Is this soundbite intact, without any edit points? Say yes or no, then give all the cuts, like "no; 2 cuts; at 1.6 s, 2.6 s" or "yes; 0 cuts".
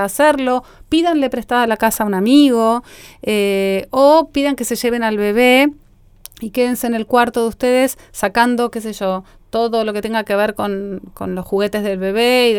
yes; 0 cuts